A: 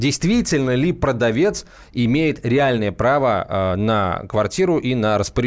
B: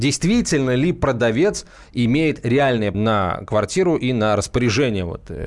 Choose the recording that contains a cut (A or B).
B